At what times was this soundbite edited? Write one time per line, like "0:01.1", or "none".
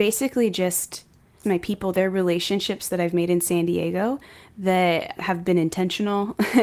0:01.4
0:05.2